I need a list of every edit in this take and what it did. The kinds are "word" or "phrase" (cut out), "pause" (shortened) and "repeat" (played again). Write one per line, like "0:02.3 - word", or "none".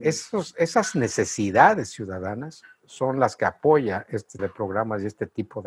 0:04.4 - word

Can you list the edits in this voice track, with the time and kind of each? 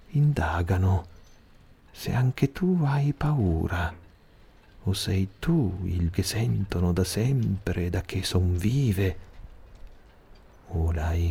0:06.1 - word

